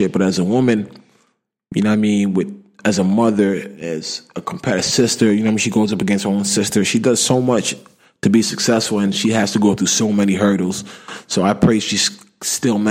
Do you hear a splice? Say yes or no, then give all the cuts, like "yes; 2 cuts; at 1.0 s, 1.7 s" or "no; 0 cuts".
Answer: no; 0 cuts